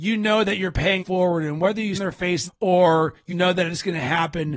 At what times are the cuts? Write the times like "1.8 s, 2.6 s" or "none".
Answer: 1.0 s, 1.9 s, 2.5 s, 3.3 s